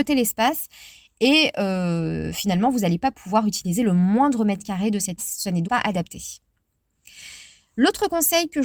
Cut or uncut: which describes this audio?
cut